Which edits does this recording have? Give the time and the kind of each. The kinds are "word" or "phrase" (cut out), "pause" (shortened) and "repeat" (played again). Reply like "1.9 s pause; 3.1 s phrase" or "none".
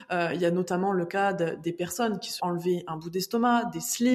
2.4 s word